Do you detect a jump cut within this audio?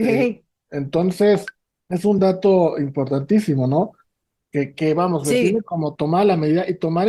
no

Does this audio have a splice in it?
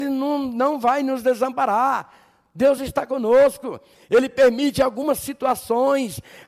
no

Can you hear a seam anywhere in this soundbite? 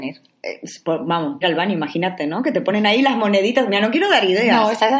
yes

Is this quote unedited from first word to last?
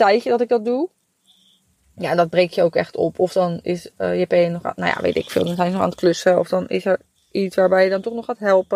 yes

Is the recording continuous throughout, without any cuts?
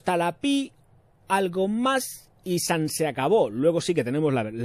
yes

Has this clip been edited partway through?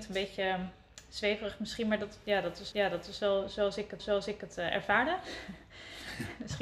yes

